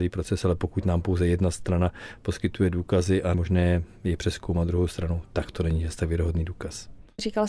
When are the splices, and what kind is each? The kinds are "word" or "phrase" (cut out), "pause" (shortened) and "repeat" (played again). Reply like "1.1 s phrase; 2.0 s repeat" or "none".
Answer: 3.3 s word